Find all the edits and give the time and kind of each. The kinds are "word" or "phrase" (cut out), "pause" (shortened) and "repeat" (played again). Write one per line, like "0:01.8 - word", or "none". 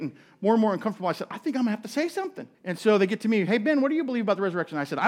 0:02.5 - pause